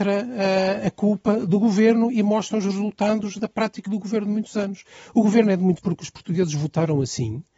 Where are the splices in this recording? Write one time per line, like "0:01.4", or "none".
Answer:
0:03.9
0:05.8